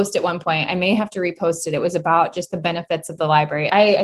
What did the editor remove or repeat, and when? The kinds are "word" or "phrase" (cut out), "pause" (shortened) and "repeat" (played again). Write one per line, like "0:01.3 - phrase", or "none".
none